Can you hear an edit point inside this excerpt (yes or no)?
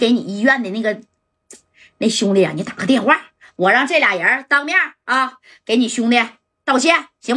no